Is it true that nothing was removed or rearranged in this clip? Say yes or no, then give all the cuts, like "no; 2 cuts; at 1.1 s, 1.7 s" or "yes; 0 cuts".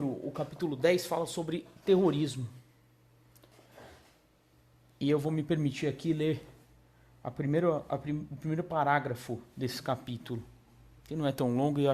yes; 0 cuts